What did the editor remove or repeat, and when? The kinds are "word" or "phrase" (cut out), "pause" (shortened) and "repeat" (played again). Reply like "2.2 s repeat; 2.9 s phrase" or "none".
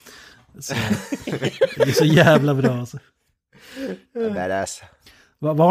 none